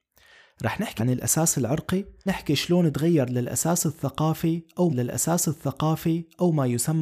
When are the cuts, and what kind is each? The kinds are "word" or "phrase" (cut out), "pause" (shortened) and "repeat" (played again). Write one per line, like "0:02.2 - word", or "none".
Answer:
0:01.0 - word
0:02.3 - word
0:04.9 - repeat

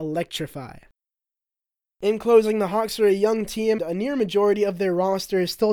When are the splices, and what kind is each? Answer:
0:03.8 - word

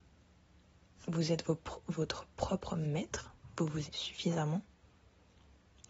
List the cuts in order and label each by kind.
0:03.9 - word

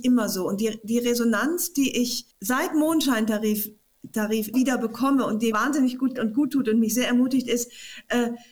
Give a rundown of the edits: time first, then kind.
0:02.3 - pause
0:04.5 - word
0:05.5 - word
0:06.2 - word

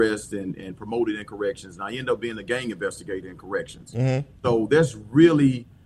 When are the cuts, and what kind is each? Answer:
0:04.4 - pause

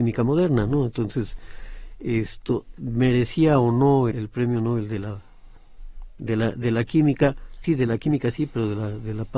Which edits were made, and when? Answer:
0:04.1 - word
0:07.6 - word

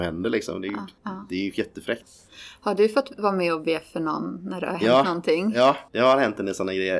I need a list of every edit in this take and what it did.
0:01.0 - pause
0:05.9 - pause

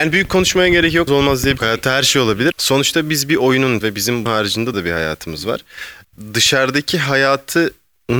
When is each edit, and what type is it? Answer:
0:01.1 - word
0:01.6 - word
0:02.5 - word
0:03.8 - word
0:04.3 - word
0:04.7 - word

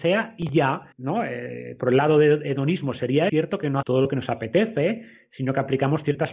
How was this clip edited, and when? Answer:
0:00.9 - pause
0:03.3 - phrase
0:03.8 - word

